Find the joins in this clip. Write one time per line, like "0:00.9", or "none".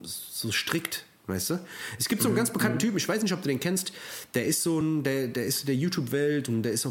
none